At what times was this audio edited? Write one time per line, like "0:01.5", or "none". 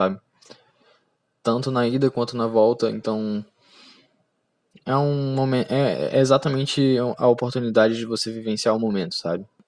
none